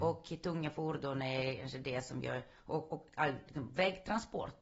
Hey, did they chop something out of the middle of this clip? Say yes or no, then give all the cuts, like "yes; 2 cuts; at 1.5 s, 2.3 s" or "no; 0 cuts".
no; 0 cuts